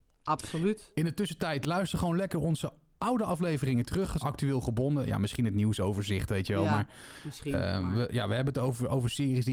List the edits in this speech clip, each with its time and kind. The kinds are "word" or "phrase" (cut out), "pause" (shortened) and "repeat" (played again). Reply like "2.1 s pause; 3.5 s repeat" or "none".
4.2 s phrase